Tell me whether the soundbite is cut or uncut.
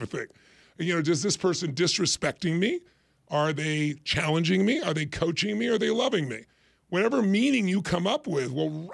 uncut